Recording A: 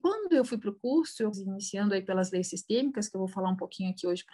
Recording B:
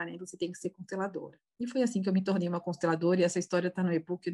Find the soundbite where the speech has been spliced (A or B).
A